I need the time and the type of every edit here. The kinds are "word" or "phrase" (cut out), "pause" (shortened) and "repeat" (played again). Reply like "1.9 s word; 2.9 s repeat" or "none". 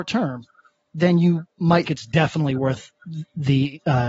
1.9 s word